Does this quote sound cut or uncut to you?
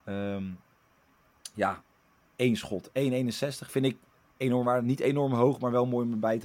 uncut